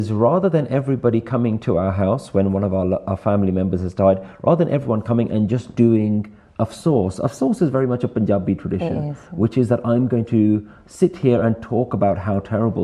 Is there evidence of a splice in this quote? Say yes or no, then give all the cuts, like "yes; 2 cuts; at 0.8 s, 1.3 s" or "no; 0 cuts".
no; 0 cuts